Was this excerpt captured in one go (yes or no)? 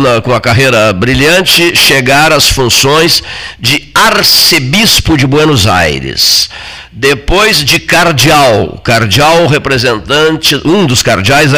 yes